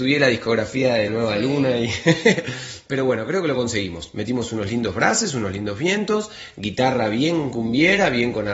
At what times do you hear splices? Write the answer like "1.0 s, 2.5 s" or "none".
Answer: 1.1 s